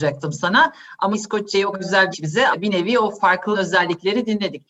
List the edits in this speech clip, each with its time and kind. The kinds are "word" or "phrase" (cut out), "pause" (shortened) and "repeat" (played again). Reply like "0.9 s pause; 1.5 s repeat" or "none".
1.1 s word; 1.7 s word; 2.1 s word; 2.5 s word; 3.5 s word